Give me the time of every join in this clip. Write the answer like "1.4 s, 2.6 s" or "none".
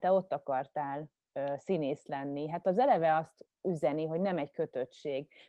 none